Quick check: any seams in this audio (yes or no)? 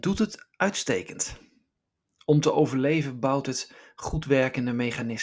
no